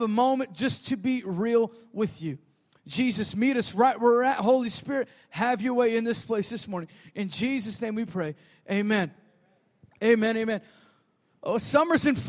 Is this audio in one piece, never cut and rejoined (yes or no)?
yes